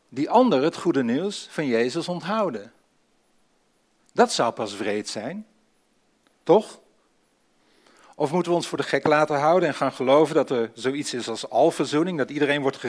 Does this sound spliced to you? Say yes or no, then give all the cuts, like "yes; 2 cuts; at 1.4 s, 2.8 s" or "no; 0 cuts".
no; 0 cuts